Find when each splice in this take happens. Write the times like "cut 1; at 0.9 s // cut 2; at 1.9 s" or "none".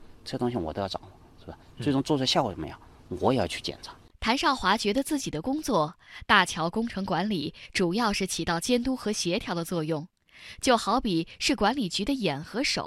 none